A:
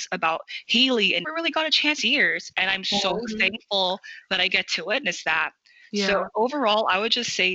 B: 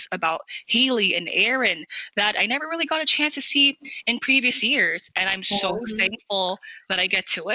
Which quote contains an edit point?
A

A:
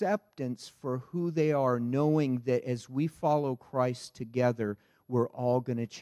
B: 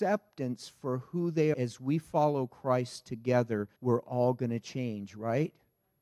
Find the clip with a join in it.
B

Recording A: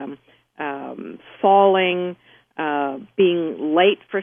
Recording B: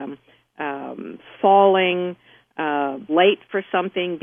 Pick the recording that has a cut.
B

